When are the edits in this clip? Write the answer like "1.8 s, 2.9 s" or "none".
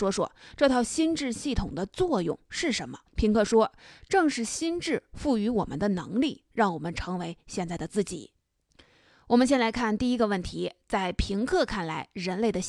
3.1 s, 8.4 s